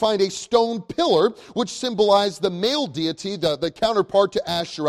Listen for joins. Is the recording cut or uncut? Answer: uncut